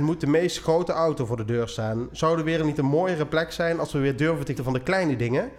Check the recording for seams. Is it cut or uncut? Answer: cut